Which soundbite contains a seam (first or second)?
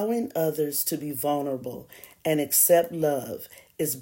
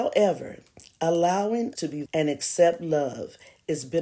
second